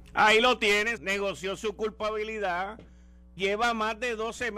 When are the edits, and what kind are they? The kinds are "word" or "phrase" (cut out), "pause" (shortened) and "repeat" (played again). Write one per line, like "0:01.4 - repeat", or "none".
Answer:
0:01.0 - word
0:03.4 - word